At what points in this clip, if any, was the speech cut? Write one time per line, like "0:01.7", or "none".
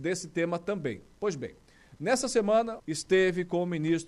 0:02.8